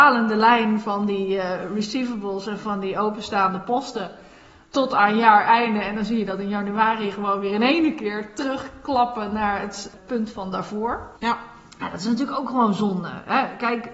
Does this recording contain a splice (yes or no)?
yes